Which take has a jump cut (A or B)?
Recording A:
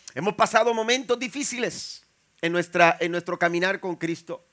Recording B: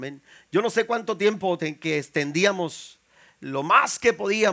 B